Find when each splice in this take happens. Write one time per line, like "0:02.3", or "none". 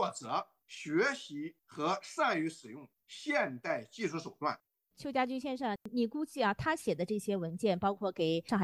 0:01.6